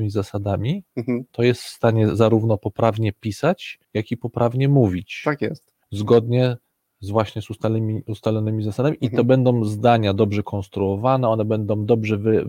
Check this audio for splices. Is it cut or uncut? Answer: cut